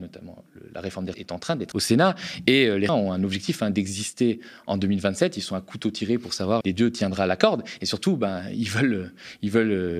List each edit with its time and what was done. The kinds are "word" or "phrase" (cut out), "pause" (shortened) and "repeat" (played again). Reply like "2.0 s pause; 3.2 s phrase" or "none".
1.1 s word; 1.7 s word; 2.9 s word; 6.6 s word